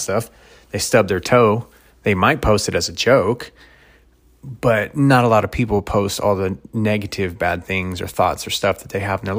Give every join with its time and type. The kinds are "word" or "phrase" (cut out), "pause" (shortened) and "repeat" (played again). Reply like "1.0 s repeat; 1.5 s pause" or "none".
none